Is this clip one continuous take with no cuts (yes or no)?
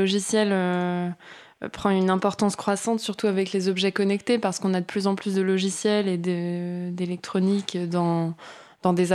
yes